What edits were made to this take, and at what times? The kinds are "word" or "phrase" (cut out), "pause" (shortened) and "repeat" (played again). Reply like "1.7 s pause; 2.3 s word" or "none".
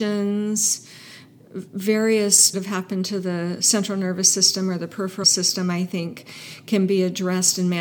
2.5 s phrase; 5.2 s word

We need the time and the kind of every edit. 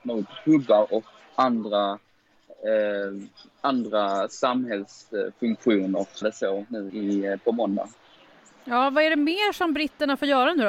1.2 s word; 6.2 s phrase; 6.9 s word

